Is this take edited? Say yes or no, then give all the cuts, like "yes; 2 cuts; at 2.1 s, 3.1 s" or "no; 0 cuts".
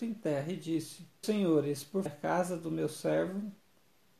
yes; 2 cuts; at 1.2 s, 2.1 s